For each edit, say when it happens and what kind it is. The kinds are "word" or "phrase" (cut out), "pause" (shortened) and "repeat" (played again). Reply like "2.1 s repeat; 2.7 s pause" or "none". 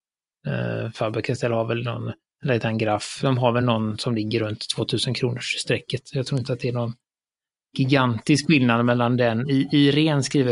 none

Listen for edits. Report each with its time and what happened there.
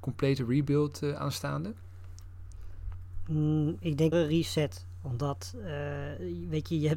4.1 s word

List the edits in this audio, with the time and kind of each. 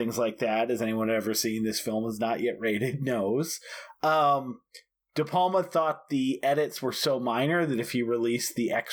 none

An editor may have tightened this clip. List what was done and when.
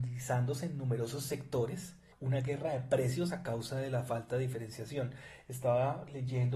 2.1 s pause

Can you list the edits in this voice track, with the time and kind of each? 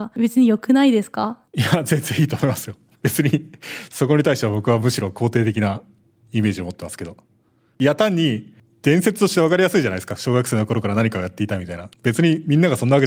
1.5 s pause; 11.9 s pause

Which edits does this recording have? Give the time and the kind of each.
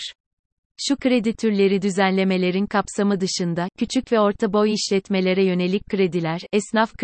none

